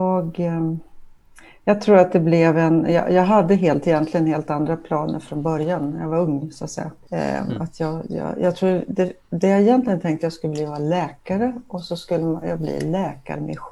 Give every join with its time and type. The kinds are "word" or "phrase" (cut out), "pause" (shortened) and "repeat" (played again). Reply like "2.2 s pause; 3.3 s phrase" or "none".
none